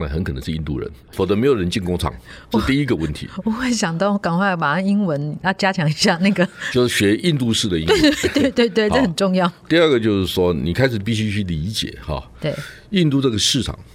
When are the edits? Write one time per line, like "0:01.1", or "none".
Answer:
0:01.0